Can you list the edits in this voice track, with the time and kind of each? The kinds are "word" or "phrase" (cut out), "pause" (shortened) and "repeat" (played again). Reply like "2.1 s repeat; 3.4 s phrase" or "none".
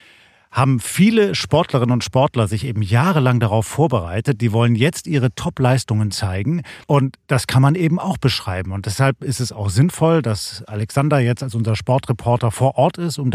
6.8 s pause

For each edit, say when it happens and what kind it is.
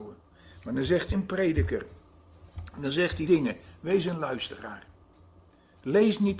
1.1 s word; 3.3 s word

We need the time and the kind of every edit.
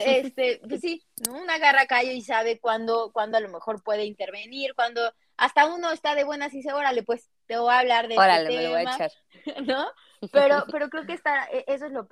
none

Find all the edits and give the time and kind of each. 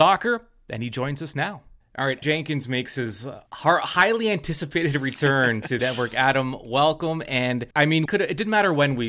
1.8 s pause; 2.2 s word; 3.5 s pause; 5.8 s phrase; 7.7 s pause; 8.1 s word

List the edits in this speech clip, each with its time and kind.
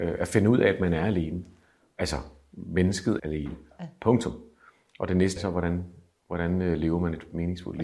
3.2 s word; 5.4 s word

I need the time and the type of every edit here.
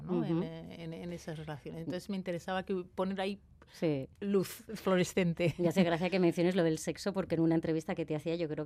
none

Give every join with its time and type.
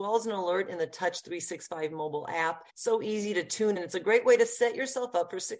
2.7 s pause; 3.8 s word

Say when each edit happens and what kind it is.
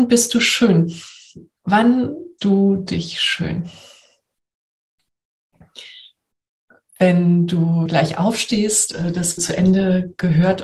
2.4 s word; 7.9 s word; 8.9 s word; 9.4 s word

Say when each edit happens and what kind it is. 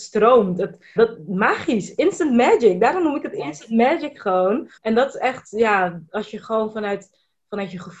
1.0 s word; 4.8 s pause

